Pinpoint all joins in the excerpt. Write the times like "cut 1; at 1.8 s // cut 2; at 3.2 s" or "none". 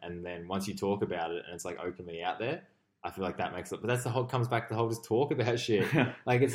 none